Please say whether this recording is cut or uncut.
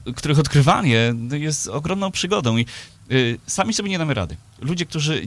uncut